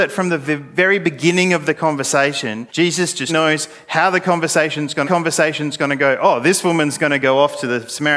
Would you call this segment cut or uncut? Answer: cut